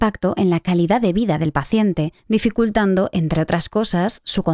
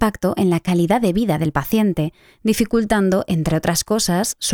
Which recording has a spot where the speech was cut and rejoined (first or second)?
first